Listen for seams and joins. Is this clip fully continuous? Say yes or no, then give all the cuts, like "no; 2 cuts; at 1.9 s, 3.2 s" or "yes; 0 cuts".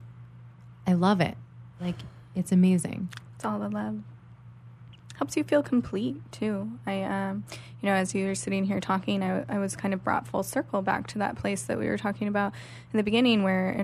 yes; 0 cuts